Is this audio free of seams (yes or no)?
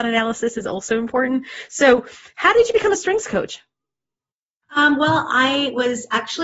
yes